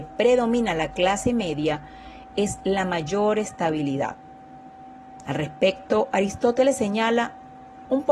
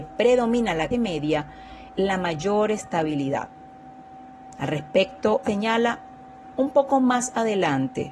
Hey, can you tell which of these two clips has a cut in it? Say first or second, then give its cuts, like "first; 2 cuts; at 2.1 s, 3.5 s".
second; 3 cuts; at 0.9 s, 1.9 s, 5.4 s